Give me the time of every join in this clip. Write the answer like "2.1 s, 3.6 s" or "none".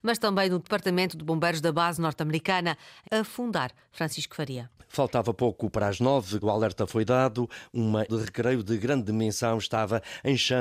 3.0 s, 6.4 s, 8.1 s